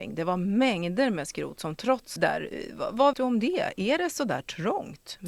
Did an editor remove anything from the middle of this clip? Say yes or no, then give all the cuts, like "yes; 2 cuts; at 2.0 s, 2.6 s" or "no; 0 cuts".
yes; 2 cuts; at 2.2 s, 3.1 s